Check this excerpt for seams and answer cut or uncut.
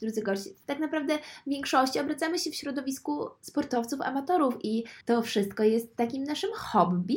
cut